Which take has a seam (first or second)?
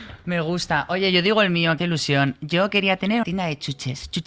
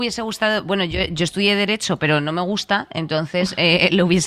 first